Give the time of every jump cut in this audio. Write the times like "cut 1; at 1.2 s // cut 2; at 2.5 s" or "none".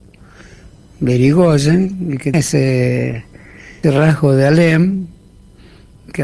cut 1; at 2.3 s // cut 2; at 3.8 s